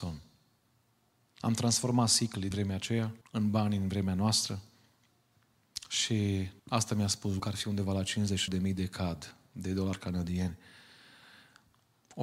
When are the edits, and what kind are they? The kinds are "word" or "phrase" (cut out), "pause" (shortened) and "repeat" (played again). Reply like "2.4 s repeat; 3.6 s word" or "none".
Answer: 2.5 s word; 3.2 s pause; 6.6 s pause; 7.4 s word; 8.5 s word